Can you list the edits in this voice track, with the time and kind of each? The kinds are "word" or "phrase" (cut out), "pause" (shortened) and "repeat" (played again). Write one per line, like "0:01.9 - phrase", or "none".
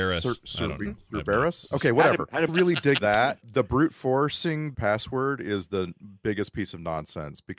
0:02.5 - phrase
0:03.0 - word
0:03.4 - word
0:04.7 - phrase